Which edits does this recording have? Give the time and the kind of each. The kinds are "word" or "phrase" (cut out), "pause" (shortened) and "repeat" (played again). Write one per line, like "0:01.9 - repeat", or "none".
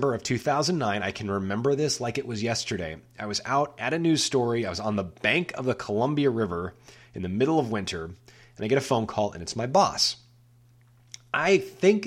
none